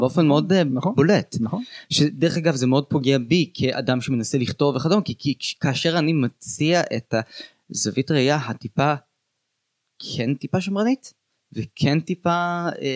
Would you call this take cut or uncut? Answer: uncut